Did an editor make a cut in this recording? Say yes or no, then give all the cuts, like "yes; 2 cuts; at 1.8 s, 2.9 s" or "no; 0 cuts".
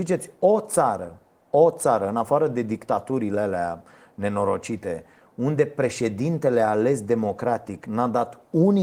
no; 0 cuts